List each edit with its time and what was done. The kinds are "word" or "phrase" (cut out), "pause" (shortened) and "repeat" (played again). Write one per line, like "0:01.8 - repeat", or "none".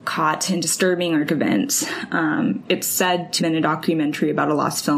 0:01.3 - word
0:03.4 - word